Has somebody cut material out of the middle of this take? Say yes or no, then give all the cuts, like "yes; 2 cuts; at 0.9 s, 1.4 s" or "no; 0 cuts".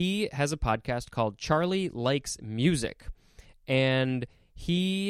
no; 0 cuts